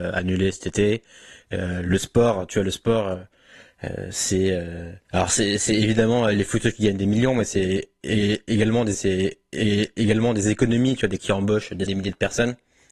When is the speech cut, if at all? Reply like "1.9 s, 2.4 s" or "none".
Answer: 5.0 s, 8.9 s, 11.2 s, 11.9 s